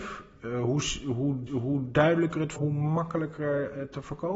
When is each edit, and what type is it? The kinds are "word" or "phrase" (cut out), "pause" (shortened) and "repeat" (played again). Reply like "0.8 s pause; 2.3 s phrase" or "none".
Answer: 1.5 s repeat; 2.6 s word